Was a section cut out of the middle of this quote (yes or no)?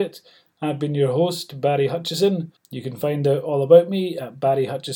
yes